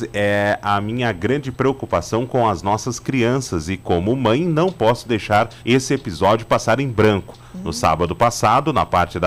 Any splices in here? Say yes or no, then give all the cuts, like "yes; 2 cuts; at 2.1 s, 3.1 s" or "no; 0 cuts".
yes; 1 cut; at 5.6 s